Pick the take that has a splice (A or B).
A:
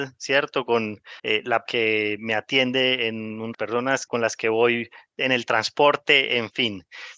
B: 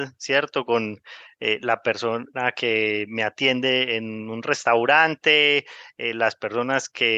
A